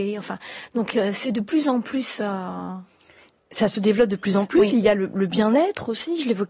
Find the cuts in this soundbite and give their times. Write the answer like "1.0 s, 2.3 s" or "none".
none

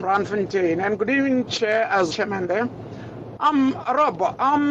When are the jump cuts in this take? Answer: 1.5 s, 2.1 s

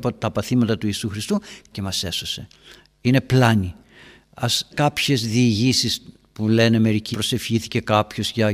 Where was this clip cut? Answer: 1.7 s, 4.7 s, 7.1 s

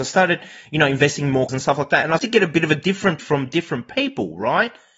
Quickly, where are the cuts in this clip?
1.5 s, 2.2 s, 3.2 s

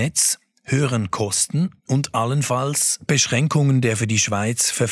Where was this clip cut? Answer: 1.8 s

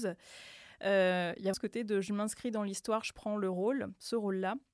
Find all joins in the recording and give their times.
1.5 s

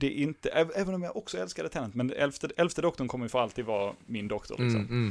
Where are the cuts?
none

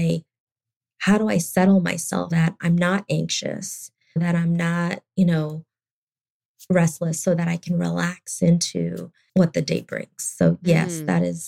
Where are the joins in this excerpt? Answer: 2.3 s, 4.2 s

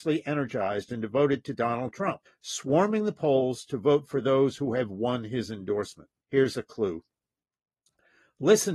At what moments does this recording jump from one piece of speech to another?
2.3 s, 6.2 s

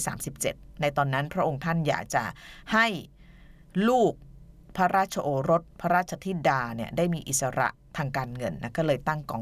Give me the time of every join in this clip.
5.7 s

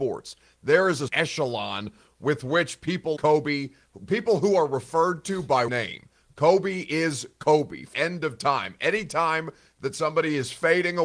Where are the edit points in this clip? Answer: 1.1 s, 3.2 s, 5.7 s, 7.9 s

